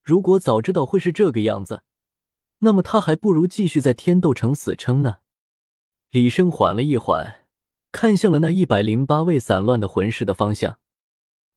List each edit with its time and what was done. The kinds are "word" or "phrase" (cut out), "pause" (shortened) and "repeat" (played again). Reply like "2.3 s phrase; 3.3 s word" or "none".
none